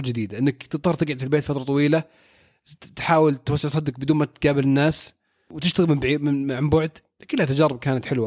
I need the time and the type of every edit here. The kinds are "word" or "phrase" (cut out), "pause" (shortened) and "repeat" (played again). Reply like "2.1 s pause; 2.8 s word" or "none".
none